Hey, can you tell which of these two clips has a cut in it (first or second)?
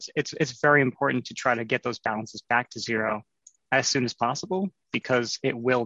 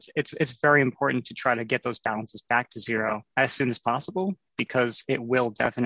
second